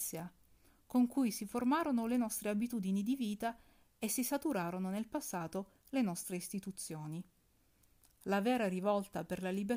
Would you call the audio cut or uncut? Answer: uncut